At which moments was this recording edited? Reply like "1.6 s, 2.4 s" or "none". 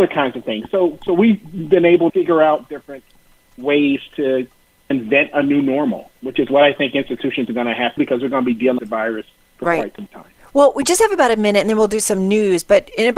2.1 s, 4.9 s, 8.0 s, 8.8 s